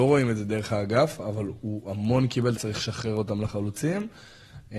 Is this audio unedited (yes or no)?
no